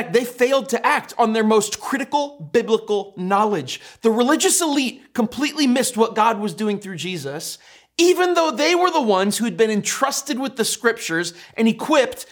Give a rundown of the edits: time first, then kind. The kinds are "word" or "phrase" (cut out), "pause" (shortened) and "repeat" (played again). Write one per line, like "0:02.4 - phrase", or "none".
none

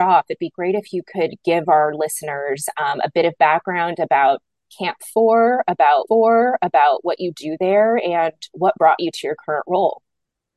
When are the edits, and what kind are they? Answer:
0:06.1 - repeat

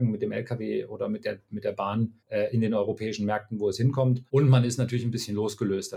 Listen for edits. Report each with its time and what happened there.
0:02.2 - pause
0:04.3 - pause

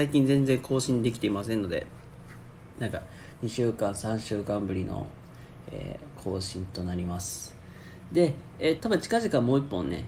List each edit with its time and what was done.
0:08.8 - word

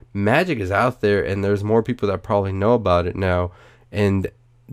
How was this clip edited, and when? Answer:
none

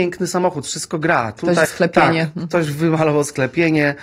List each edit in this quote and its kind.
0:01.6 - word

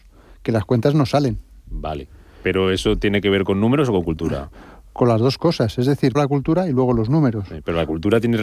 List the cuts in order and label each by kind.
0:06.1 - word

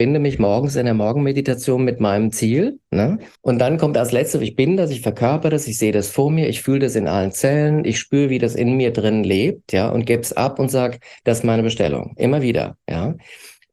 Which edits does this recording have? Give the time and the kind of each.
0:03.4 - pause

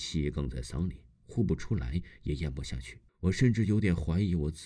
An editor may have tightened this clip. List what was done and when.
0:03.1 - pause

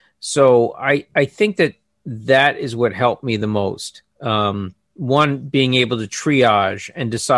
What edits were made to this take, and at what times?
none

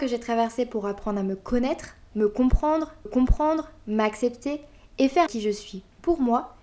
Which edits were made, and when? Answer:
0:03.1 - repeat
0:05.3 - word

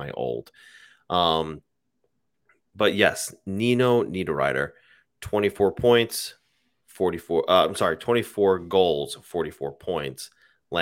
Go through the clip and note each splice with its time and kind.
none

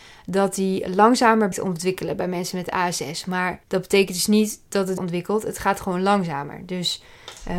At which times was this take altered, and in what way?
0:01.5 - word
0:03.6 - pause
0:05.0 - phrase

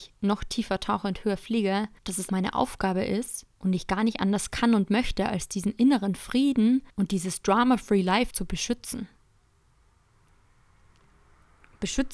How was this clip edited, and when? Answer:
0:02.0 - pause
0:02.3 - word
0:03.5 - pause
0:06.9 - pause
0:08.3 - word

